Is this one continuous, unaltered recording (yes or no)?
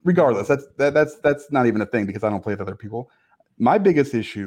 yes